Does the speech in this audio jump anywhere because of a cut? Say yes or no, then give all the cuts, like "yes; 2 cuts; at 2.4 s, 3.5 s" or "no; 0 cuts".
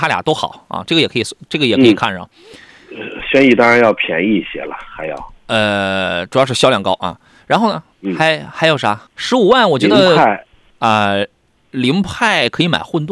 yes; 3 cuts; at 7.9 s, 9.1 s, 10.7 s